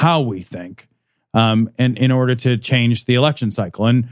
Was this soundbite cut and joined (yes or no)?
no